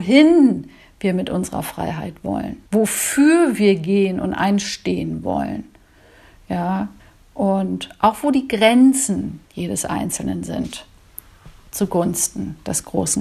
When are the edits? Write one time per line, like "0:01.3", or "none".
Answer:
0:02.7
0:07.0
0:09.5